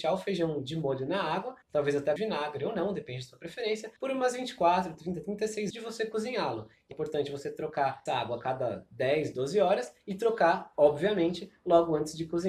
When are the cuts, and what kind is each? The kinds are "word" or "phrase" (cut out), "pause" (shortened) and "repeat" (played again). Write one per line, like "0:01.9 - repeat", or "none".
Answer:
0:01.6 - pause
0:02.2 - phrase
0:04.0 - pause
0:05.7 - phrase
0:06.9 - phrase
0:08.1 - word